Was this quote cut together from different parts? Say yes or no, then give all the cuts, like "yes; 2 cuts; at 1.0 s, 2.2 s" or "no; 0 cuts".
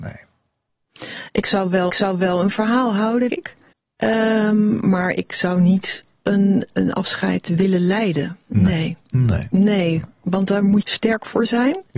yes; 5 cuts; at 1.9 s, 3.3 s, 3.7 s, 6.7 s, 10.8 s